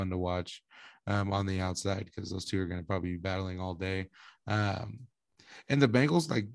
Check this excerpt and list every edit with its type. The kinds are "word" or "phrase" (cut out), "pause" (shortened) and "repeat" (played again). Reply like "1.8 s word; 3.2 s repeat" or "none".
none